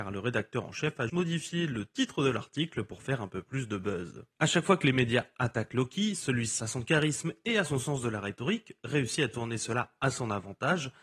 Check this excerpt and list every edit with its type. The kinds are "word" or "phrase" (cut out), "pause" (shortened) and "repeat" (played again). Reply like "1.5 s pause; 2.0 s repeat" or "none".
1.1 s word; 4.3 s pause; 6.6 s word